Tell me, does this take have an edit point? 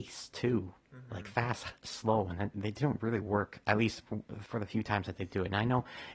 no; 0 cuts

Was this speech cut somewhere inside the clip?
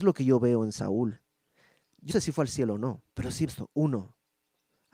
yes; 3 cuts; at 2.1 s, 3.1 s, 3.5 s

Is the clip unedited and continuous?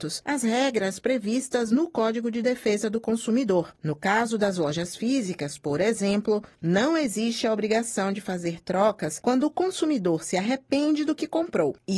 yes; 0 cuts

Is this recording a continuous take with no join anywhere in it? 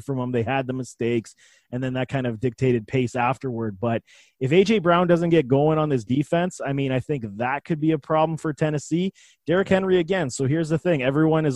yes; 0 cuts

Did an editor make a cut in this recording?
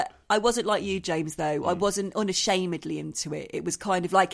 no; 0 cuts

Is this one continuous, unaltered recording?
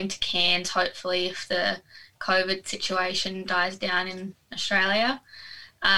yes; 0 cuts

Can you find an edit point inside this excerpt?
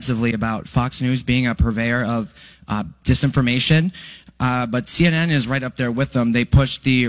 no; 0 cuts

